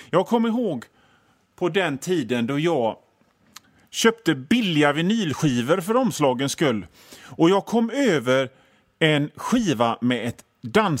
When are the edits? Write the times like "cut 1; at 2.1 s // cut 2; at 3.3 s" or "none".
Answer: none